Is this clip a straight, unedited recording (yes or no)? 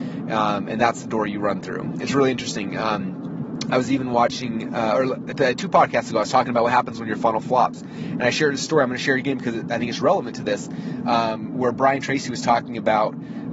yes